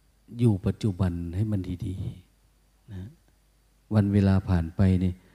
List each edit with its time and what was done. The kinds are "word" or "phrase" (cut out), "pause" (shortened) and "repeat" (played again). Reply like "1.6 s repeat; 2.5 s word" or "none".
none